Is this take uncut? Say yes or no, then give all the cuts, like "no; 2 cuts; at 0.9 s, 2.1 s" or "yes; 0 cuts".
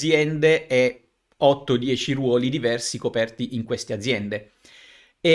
yes; 0 cuts